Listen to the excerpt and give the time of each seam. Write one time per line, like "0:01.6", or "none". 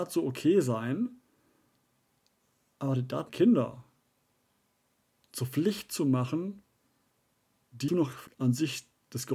0:03.3
0:07.9
0:08.3